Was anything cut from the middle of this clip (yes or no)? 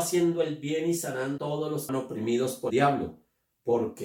yes